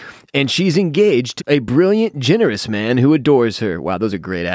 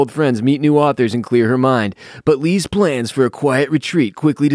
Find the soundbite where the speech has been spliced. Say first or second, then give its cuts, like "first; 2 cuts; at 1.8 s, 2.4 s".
first; 1 cut; at 1.4 s